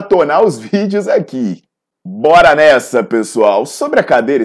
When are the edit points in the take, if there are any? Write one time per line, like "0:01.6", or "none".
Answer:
0:01.7